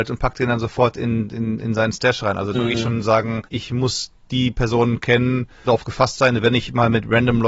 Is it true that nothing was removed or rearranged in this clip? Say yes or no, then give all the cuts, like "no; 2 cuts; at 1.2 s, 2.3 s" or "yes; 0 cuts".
no; 3 cuts; at 2.5 s, 3.5 s, 5.7 s